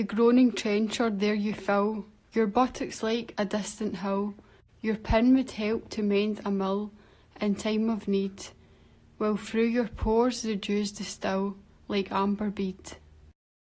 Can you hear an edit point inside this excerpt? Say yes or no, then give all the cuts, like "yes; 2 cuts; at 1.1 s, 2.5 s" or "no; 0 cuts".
no; 0 cuts